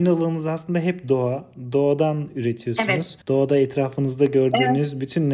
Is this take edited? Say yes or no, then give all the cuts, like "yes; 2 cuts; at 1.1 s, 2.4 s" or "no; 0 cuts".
yes; 1 cut; at 3.2 s